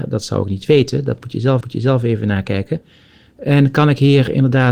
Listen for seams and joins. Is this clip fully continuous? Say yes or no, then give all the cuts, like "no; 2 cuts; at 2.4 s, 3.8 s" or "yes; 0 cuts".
no; 1 cut; at 1.6 s